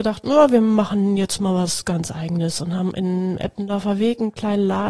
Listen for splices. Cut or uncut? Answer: uncut